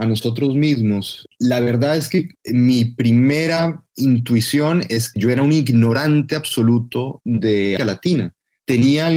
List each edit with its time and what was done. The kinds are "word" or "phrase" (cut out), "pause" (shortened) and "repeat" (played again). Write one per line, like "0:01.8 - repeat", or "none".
0:05.1 - word
0:07.8 - word